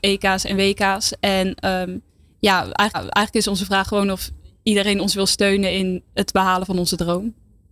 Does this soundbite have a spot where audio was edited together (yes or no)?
yes